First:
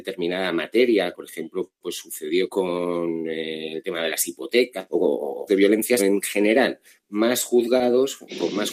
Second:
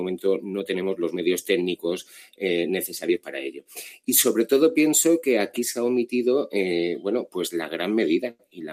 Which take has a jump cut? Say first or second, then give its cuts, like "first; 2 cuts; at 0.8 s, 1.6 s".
first; 5 cuts; at 1.1 s, 2.5 s, 4.9 s, 5.5 s, 6.0 s